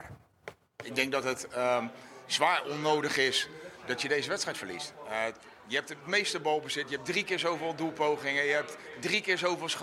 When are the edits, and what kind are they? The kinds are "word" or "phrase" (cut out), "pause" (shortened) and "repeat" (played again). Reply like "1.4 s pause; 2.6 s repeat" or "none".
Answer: none

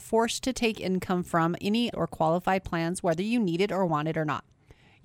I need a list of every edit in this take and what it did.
1.9 s word

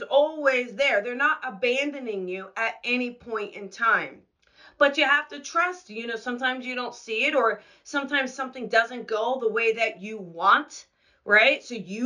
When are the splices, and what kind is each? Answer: none

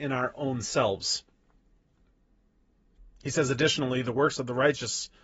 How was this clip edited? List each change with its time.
none

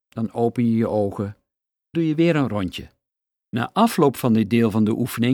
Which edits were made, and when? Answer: 1.9 s word; 3.1 s pause

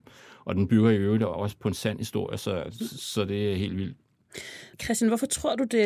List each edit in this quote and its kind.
4.7 s pause

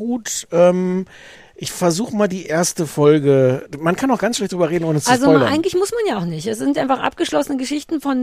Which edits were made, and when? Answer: 1.4 s pause

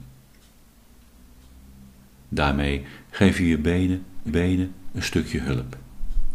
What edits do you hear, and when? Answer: 4.3 s repeat

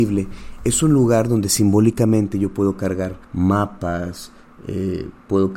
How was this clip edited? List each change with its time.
3.2 s pause

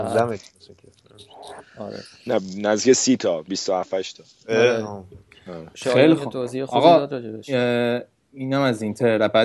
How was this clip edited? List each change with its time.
none

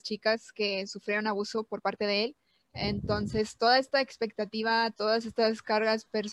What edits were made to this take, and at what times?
none

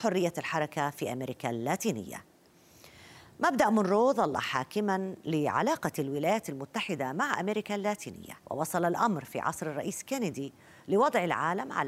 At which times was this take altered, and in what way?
8.4 s pause

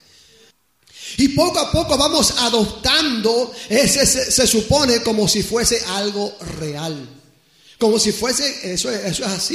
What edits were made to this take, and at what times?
none

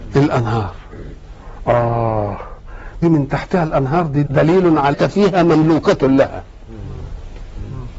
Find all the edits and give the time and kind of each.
3.0 s word; 4.3 s word; 4.9 s phrase

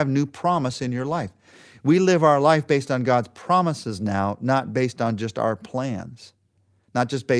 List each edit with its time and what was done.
none

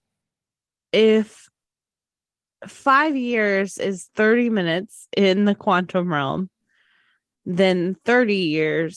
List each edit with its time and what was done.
none

